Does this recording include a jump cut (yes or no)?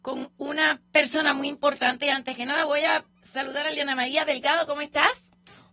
no